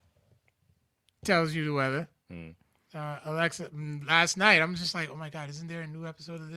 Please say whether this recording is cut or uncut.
uncut